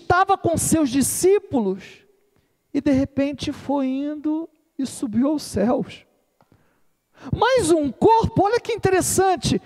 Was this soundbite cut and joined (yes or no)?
no